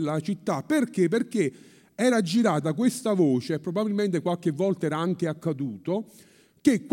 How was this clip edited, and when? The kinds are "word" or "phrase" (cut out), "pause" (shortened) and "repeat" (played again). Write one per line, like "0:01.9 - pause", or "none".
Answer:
none

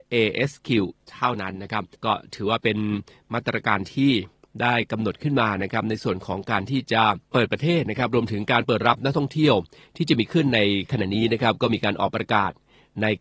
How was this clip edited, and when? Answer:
0:01.9 - pause
0:07.2 - pause

